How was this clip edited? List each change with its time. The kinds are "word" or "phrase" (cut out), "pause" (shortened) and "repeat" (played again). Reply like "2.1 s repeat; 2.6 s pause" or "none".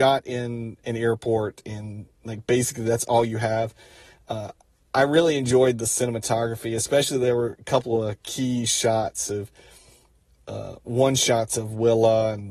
none